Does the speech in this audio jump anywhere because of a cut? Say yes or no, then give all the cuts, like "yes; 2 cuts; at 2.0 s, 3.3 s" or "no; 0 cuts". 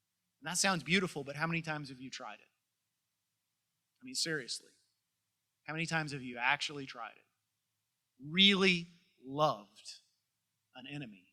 no; 0 cuts